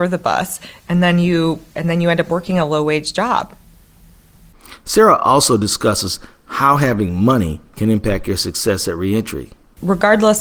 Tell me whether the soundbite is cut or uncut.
uncut